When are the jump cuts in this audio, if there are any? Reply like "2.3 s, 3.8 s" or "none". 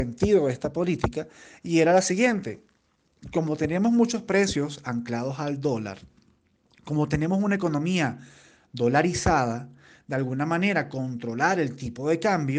none